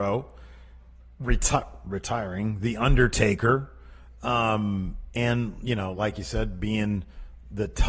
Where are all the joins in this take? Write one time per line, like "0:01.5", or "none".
none